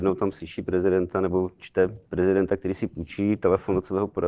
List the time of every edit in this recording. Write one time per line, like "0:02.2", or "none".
0:02.0